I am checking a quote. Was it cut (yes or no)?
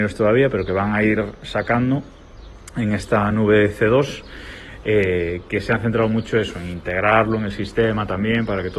no